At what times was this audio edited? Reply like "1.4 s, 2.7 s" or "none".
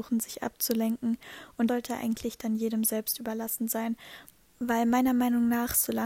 1.7 s